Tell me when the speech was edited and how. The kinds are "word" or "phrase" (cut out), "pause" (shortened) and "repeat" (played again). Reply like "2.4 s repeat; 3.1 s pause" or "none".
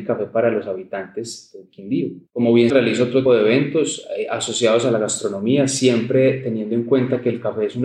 2.3 s pause; 2.7 s word; 3.3 s word